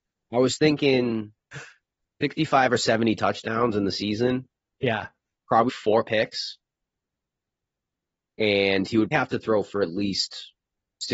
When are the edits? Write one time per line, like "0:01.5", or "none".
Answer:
0:05.7
0:09.1